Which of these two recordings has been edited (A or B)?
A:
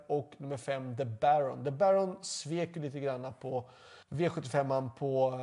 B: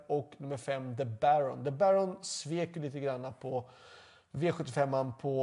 A